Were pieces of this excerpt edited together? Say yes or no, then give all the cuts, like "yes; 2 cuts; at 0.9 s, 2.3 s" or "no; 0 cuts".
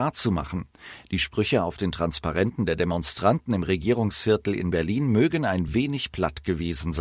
no; 0 cuts